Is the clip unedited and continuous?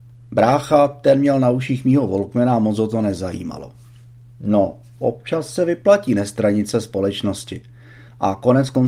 yes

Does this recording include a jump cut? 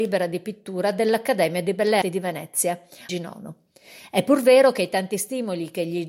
yes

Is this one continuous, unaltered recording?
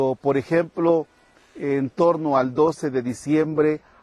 yes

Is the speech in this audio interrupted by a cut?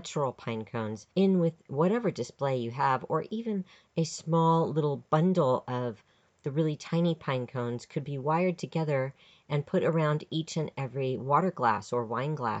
yes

